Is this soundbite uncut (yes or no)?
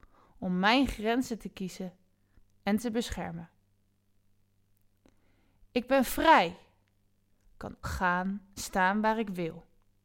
no